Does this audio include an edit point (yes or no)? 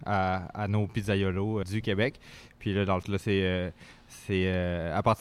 yes